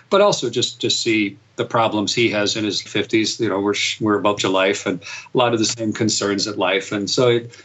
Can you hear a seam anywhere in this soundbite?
yes; 2 cuts; at 2.9 s, 4.4 s

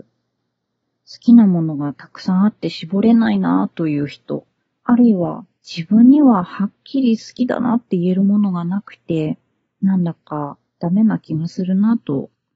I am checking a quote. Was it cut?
yes; 3 cuts; at 4.7 s, 5.5 s, 10.7 s

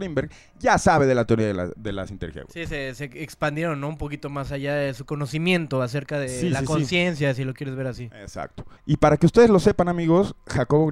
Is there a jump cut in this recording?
yes; 1 cut; at 8.8 s

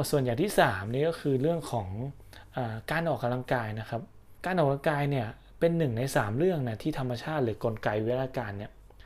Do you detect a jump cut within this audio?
yes; 1 cut; at 4.4 s

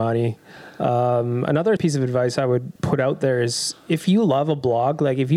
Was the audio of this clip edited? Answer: yes; 2 cuts; at 1.8 s, 2.8 s

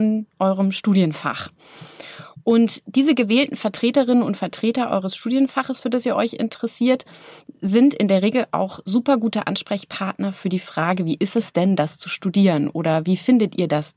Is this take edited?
no; 0 cuts

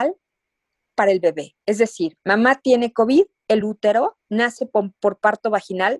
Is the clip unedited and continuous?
no; 2 cuts; at 3.6 s, 4.2 s

